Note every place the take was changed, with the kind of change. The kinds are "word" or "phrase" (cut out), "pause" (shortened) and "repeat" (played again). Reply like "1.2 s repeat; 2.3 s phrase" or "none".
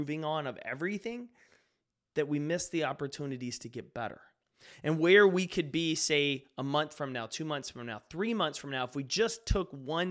none